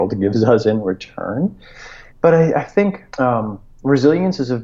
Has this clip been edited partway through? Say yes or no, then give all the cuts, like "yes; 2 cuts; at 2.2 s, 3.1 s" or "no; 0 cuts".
yes; 2 cuts; at 2.1 s, 3.1 s